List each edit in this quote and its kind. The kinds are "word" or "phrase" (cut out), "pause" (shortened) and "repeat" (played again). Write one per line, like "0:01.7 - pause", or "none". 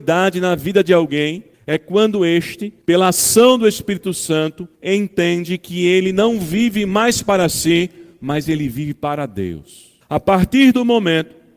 0:01.5 - pause
0:02.8 - pause
0:04.7 - pause
0:10.0 - pause